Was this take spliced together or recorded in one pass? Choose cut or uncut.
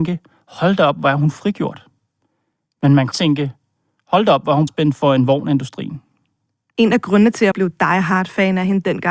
cut